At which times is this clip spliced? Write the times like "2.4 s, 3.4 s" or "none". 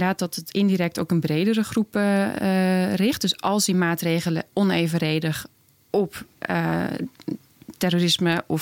none